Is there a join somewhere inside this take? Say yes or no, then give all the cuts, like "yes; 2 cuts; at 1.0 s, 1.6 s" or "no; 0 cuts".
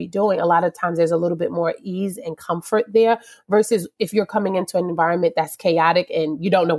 no; 0 cuts